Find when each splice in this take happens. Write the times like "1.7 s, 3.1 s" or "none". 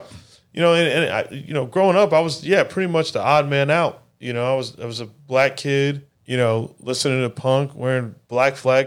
4.1 s, 6.1 s